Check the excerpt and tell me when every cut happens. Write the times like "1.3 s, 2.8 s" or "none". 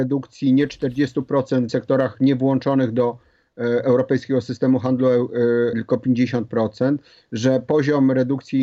1.7 s, 5.7 s